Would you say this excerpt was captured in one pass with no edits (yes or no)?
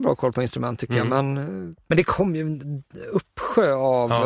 no